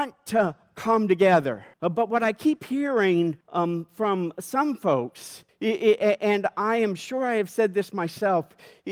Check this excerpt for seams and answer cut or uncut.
cut